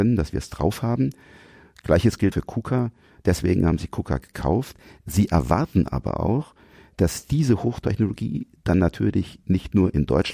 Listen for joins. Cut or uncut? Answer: cut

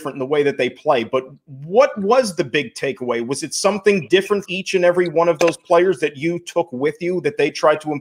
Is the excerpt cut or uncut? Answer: cut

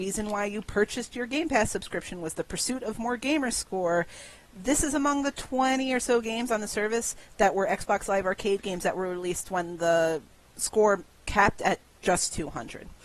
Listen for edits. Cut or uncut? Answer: uncut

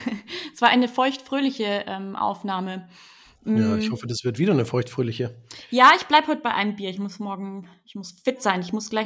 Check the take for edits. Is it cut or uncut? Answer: uncut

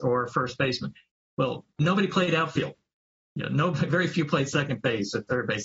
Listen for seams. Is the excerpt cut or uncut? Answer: uncut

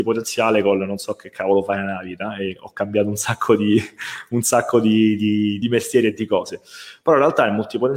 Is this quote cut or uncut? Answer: cut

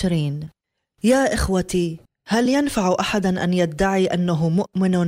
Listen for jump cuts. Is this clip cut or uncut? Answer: uncut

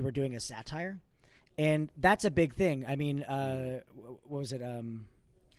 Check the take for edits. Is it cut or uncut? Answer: uncut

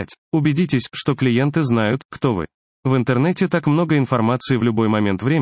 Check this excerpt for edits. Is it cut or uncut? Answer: uncut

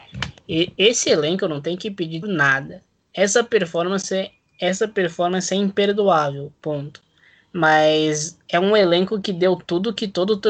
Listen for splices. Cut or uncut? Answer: cut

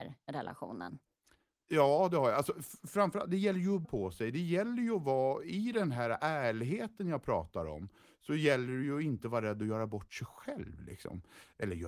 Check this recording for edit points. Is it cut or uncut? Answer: cut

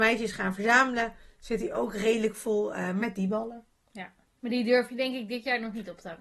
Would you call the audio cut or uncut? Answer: uncut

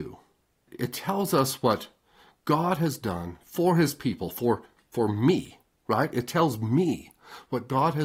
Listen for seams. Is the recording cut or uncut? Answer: uncut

